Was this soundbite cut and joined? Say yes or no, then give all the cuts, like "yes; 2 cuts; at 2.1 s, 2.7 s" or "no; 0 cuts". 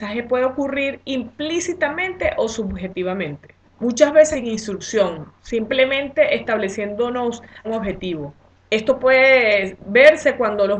yes; 4 cuts; at 3.7 s, 4.3 s, 7.6 s, 8.5 s